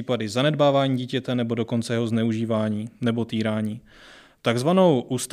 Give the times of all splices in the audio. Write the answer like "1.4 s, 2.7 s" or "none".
none